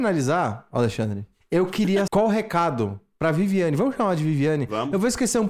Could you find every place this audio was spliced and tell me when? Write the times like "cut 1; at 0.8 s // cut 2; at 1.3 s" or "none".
cut 1; at 2.1 s